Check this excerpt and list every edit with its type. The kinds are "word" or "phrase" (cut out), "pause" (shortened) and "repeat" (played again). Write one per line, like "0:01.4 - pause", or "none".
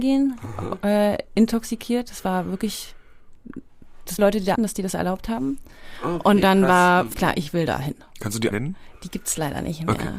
0:04.2 - word
0:04.6 - word
0:07.1 - word
0:08.5 - word